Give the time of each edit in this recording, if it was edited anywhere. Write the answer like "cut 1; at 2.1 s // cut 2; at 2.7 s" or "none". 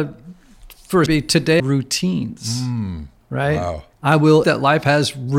cut 1; at 1.1 s // cut 2; at 1.6 s // cut 3; at 3.9 s // cut 4; at 4.4 s